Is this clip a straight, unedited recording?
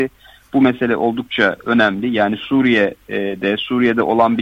yes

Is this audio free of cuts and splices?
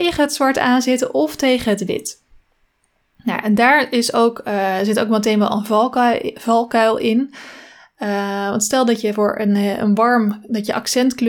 yes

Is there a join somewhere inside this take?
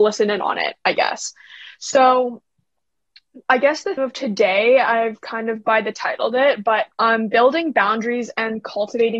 yes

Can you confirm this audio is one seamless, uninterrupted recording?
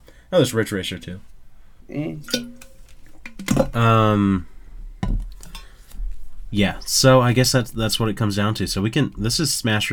no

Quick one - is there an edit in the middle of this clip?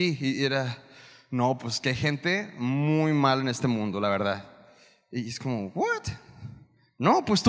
no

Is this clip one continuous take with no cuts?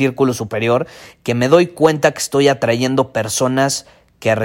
yes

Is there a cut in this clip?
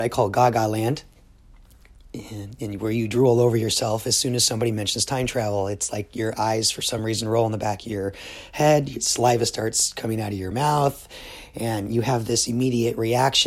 no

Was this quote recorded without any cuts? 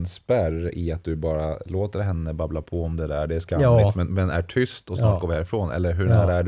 yes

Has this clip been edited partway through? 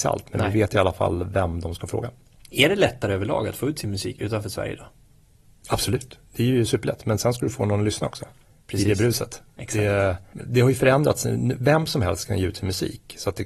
no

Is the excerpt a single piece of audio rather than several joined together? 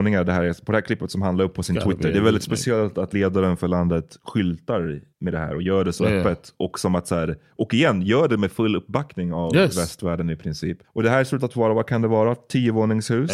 no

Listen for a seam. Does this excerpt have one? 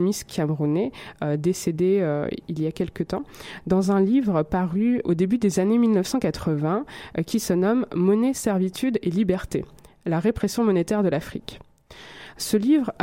yes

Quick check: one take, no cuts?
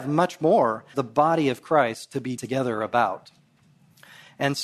no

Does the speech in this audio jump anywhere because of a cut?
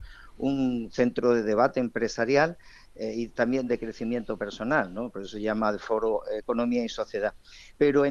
no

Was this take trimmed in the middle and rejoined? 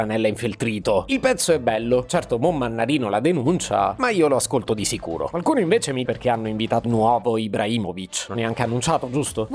yes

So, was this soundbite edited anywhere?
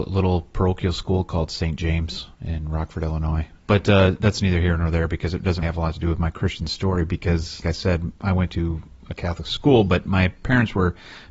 yes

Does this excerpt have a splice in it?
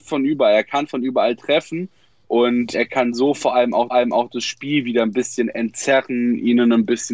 yes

